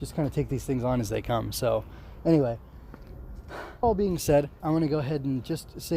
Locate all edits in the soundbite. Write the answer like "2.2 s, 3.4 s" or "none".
3.8 s, 4.6 s